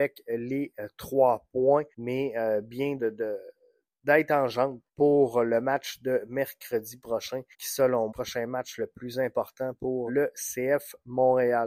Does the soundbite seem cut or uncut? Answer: cut